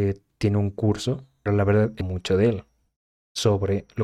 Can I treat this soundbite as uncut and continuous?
no; 2 cuts; at 1.5 s, 2.0 s

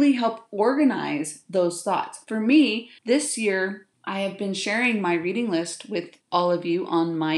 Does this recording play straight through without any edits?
no; 3 cuts; at 3.0 s, 3.9 s, 6.2 s

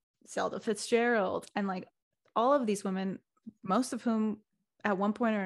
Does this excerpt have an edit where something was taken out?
no; 0 cuts

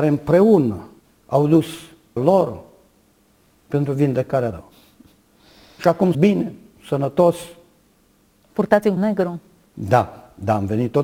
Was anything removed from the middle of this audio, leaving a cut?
yes; 5 cuts; at 1.0 s, 2.2 s, 4.5 s, 6.1 s, 9.0 s

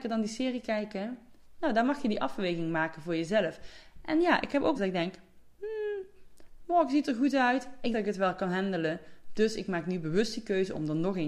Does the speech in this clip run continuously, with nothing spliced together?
no; 2 cuts; at 4.7 s, 7.9 s

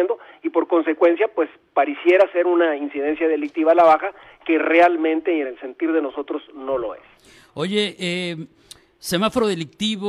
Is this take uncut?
yes; 0 cuts

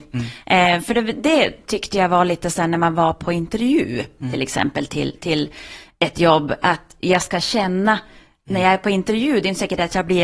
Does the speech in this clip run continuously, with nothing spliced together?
yes; 0 cuts

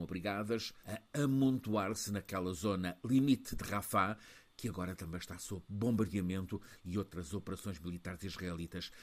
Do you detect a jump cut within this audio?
no; 0 cuts

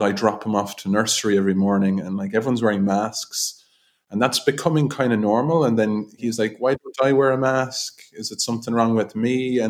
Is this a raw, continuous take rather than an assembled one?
yes; 0 cuts

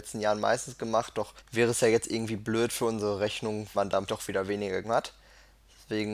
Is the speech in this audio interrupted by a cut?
yes; 4 cuts; at 1.4 s, 3.7 s, 4.1 s, 4.8 s

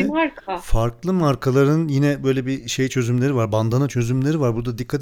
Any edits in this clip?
no; 0 cuts

